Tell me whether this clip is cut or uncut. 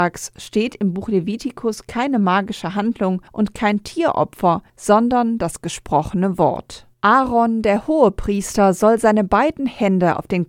cut